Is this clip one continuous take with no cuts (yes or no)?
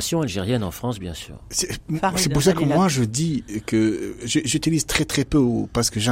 yes